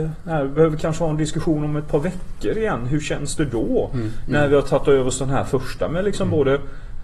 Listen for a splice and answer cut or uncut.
uncut